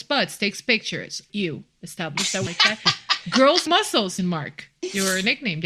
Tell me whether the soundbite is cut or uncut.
cut